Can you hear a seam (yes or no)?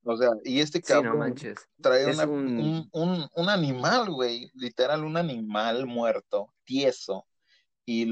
yes